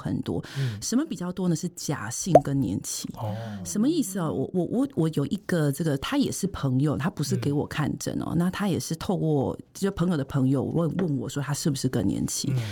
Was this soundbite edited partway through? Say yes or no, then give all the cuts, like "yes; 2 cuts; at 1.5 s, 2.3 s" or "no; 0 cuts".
no; 0 cuts